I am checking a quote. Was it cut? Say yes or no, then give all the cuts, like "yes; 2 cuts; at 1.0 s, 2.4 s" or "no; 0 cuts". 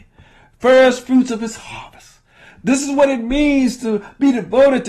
no; 0 cuts